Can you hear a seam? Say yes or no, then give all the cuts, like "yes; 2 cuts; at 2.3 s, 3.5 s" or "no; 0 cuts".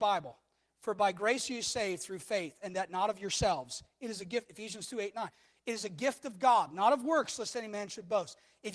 no; 0 cuts